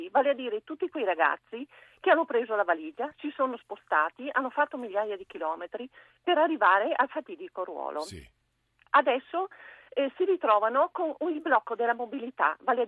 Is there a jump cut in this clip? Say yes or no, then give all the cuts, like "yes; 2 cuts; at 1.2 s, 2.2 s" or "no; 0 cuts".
no; 0 cuts